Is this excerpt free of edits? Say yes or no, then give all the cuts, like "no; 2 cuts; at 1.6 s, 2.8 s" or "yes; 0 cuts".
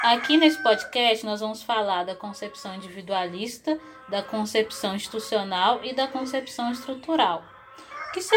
yes; 0 cuts